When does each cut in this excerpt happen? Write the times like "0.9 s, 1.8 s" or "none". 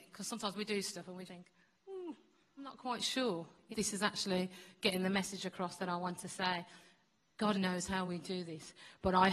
1.3 s, 2.6 s, 3.7 s, 7.5 s, 8.0 s